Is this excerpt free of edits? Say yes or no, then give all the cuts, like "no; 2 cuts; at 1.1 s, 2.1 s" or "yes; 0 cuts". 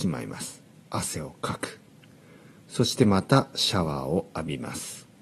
no; 1 cut; at 2.0 s